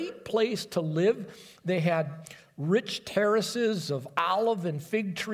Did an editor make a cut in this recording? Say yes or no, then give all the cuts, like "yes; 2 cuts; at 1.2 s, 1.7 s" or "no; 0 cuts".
no; 0 cuts